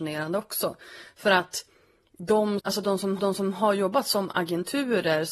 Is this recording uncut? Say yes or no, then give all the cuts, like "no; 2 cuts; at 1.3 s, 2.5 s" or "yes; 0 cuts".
no; 2 cuts; at 2.6 s, 3.2 s